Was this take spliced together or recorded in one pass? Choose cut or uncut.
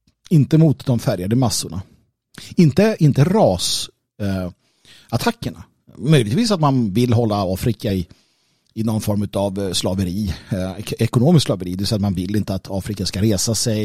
uncut